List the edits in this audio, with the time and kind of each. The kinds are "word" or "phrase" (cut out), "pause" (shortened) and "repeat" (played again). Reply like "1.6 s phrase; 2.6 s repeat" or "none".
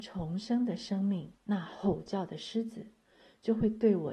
1.4 s pause